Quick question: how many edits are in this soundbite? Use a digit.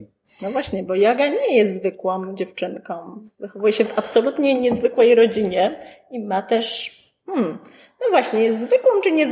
0